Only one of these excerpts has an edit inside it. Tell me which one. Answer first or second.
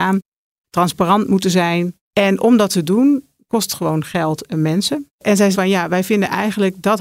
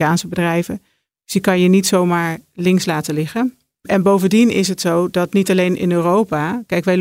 first